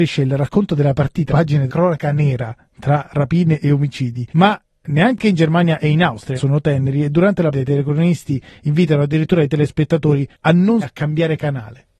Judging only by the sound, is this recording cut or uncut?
cut